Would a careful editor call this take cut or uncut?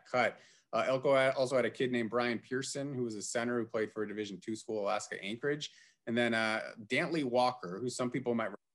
uncut